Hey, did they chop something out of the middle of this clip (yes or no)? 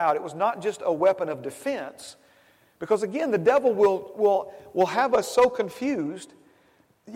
no